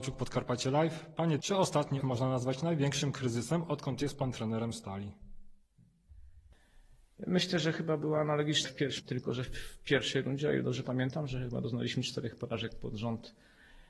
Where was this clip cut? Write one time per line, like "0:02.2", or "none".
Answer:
0:01.4
0:02.0
0:08.6
0:09.0